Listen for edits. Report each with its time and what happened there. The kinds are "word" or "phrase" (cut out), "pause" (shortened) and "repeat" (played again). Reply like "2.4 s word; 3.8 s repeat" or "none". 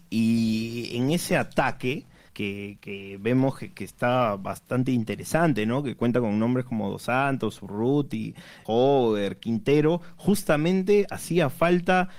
2.3 s pause; 8.6 s word